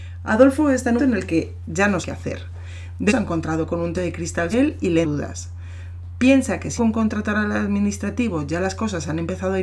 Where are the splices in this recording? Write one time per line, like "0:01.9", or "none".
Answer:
0:01.0
0:02.0
0:03.1
0:03.9
0:04.5
0:05.0
0:06.8